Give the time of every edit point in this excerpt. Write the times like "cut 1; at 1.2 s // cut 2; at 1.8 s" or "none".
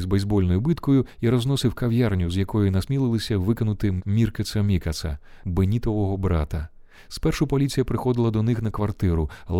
none